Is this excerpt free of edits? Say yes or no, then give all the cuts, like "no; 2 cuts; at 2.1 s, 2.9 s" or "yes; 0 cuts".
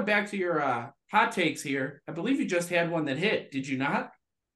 yes; 0 cuts